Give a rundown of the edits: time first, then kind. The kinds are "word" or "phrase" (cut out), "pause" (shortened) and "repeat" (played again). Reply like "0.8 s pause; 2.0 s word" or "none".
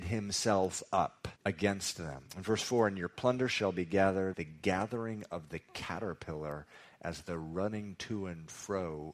1.4 s pause; 2.3 s pause; 4.3 s word